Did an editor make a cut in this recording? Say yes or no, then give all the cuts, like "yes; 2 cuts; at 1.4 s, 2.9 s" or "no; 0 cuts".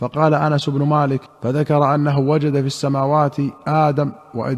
yes; 1 cut; at 1.3 s